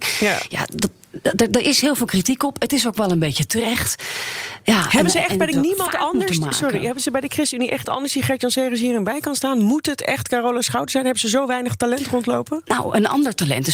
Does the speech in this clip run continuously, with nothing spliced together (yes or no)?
no